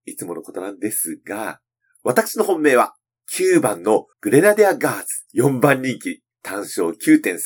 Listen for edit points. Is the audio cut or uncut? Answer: cut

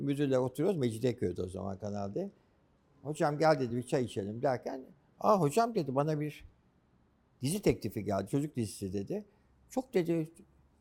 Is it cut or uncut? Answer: uncut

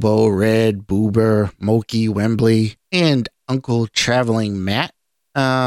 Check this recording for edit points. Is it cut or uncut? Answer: cut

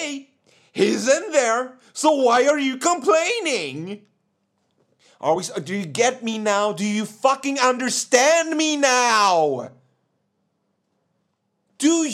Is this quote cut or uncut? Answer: uncut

